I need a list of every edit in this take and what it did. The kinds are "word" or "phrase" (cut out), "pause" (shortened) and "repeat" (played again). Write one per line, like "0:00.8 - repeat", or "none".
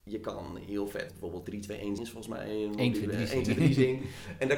0:01.1 - word
0:01.4 - word
0:02.0 - word